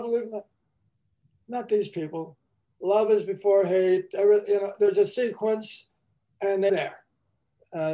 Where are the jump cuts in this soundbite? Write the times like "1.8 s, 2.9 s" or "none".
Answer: 6.7 s